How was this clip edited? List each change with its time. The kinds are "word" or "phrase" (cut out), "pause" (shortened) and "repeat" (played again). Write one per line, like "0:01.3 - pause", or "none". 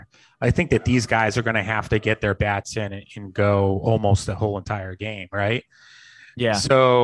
none